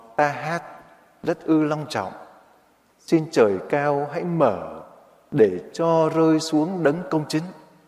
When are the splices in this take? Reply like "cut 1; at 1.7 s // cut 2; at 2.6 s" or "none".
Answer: none